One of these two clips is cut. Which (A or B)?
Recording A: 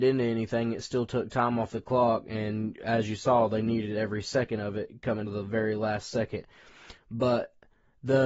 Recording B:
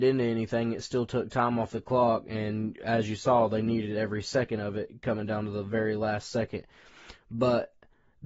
A